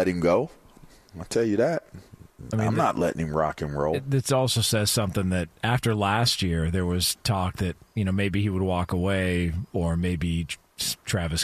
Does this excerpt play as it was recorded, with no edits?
yes; 0 cuts

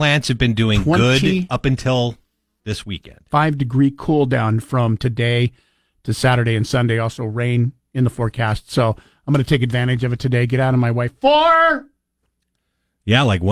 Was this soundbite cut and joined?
yes; 1 cut; at 2.6 s

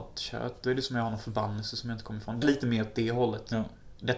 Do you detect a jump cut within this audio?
yes; 1 cut; at 2.4 s

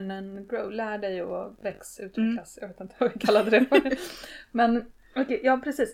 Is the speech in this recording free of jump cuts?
yes; 0 cuts

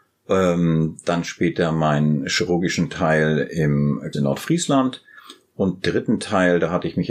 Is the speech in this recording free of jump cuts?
no; 2 cuts; at 4.1 s, 5.8 s

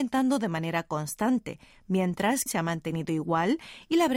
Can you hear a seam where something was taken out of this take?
yes; 1 cut; at 2.5 s

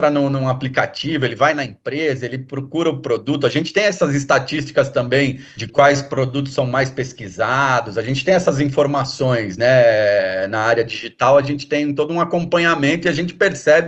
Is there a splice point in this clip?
no; 0 cuts

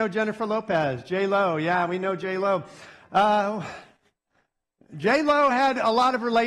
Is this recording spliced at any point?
no; 0 cuts

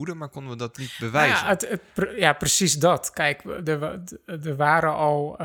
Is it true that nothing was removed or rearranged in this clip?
yes; 0 cuts

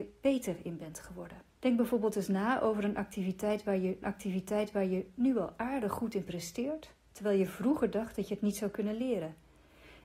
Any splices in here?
yes; 2 cuts; at 1.5 s, 4.0 s

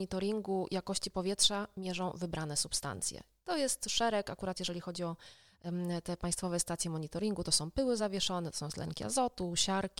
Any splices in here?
no; 0 cuts

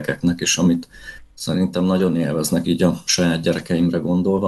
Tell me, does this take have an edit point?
yes; 1 cut; at 2.6 s

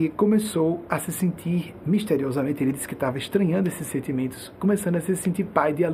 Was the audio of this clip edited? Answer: no; 0 cuts

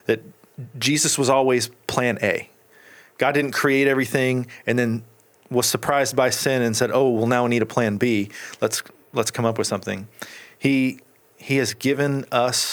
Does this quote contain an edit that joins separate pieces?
no; 0 cuts

